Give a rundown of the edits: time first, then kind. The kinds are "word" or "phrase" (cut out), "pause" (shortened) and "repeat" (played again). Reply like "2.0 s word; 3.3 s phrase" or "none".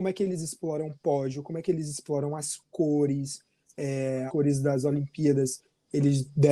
4.3 s word